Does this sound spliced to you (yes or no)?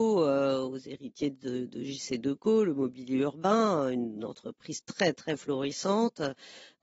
no